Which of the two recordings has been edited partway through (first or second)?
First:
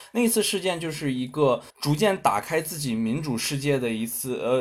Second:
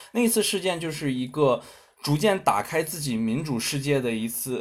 first